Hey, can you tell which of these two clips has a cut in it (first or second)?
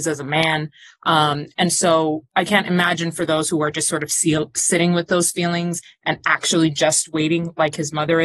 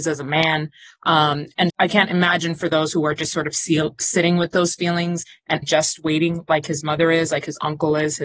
second